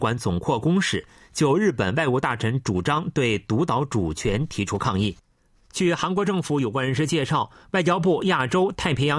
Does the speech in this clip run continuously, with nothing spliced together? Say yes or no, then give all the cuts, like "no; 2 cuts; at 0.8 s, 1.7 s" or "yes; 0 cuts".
yes; 0 cuts